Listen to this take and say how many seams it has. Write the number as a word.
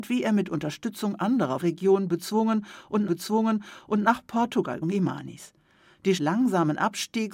four